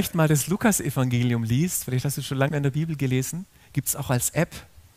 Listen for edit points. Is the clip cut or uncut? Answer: cut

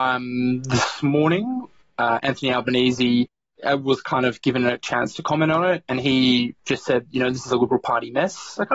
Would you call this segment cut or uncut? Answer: uncut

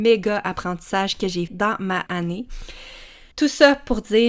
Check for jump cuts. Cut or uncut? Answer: cut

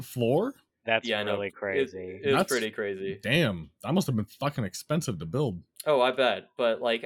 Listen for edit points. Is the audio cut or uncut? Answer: cut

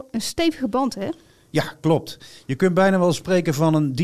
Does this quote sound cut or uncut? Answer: uncut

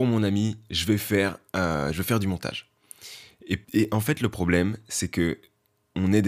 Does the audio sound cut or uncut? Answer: cut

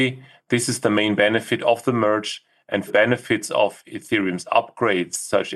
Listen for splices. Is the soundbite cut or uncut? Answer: cut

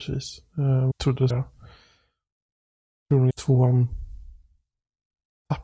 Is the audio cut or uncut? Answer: cut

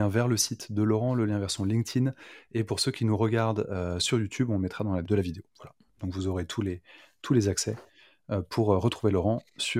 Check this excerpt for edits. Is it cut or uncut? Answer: cut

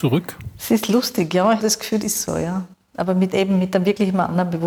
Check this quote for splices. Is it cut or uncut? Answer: cut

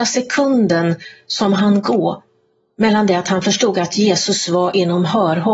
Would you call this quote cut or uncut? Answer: uncut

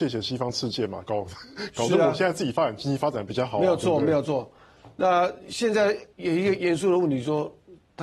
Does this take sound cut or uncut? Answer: cut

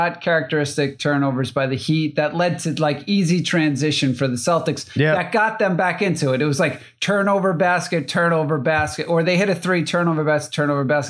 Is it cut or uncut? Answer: uncut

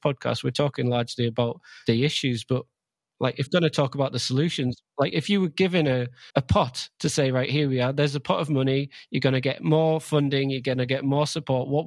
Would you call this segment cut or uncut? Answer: cut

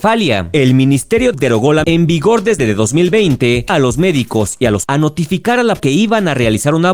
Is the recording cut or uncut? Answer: cut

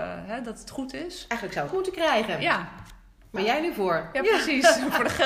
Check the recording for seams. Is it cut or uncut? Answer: cut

